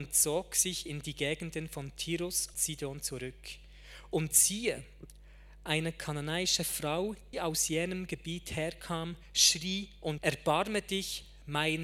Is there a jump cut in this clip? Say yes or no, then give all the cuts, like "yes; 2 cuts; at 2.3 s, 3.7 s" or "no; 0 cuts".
yes; 3 cuts; at 2.5 s, 7.3 s, 10.2 s